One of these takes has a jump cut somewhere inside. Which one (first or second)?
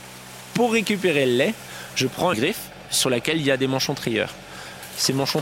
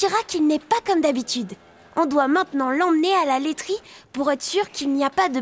first